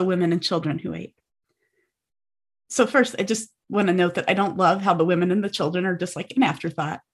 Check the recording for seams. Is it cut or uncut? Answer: uncut